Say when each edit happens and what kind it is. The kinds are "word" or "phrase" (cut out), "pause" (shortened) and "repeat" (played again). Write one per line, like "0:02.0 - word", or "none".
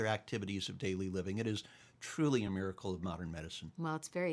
none